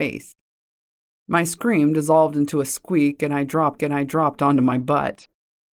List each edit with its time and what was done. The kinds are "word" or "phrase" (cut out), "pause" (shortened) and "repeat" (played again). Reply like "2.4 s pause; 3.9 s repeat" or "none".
3.8 s repeat

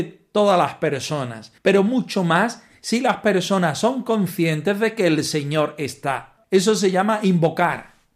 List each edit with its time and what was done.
1.6 s pause; 6.4 s pause

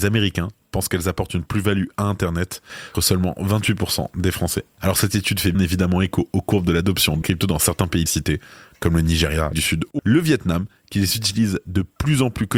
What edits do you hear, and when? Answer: 2.9 s word; 5.5 s word; 7.2 s word; 8.1 s word; 9.5 s word; 10.0 s word

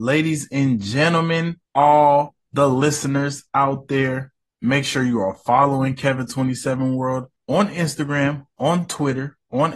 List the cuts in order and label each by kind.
1.7 s pause; 4.4 s pause; 7.4 s pause

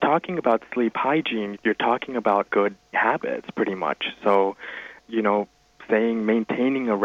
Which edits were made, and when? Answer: 1.5 s word; 2.5 s word; 2.9 s word; 5.0 s word

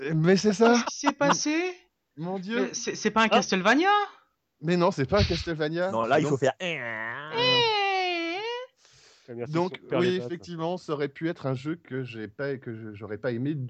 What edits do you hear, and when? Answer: none

